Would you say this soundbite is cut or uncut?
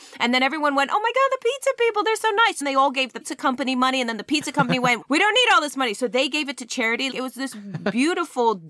cut